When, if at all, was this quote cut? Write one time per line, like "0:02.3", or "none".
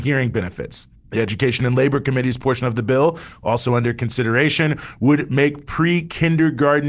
0:00.9